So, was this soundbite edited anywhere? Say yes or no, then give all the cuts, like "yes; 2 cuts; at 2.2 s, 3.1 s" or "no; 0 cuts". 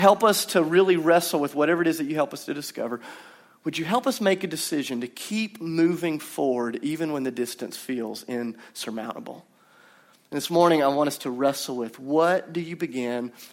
no; 0 cuts